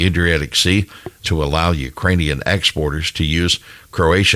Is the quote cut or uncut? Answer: cut